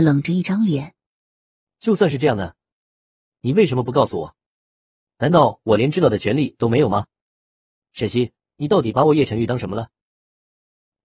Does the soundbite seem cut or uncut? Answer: uncut